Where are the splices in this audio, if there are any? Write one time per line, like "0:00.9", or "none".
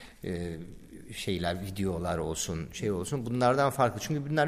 none